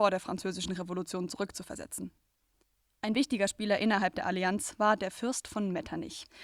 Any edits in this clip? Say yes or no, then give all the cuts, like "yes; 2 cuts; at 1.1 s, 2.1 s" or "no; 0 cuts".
no; 0 cuts